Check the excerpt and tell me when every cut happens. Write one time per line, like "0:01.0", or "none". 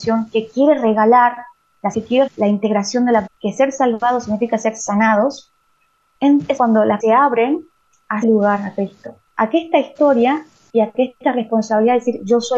0:01.9
0:02.3
0:03.3
0:06.6
0:07.0
0:08.2